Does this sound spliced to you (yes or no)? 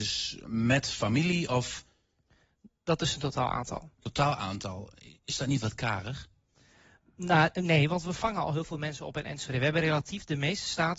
no